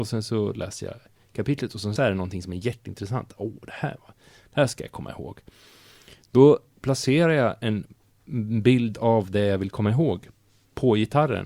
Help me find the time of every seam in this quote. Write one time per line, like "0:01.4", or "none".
0:02.0